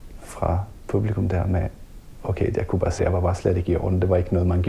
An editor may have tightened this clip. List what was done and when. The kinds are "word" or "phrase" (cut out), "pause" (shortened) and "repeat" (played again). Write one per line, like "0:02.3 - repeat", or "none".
0:03.0 - word